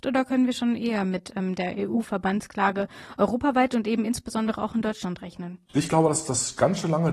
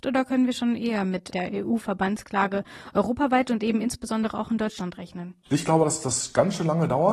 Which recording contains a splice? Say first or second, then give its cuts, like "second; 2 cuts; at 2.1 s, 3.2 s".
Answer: second; 1 cut; at 1.3 s